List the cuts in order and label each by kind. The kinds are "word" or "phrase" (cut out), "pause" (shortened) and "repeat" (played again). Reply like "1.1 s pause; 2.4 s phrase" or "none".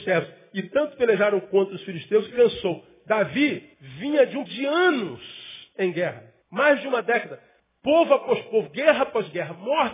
2.3 s phrase; 3.7 s pause; 4.5 s word; 6.4 s pause; 7.6 s pause